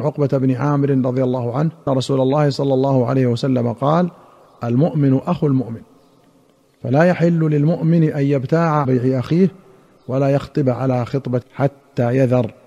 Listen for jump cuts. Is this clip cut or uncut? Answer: cut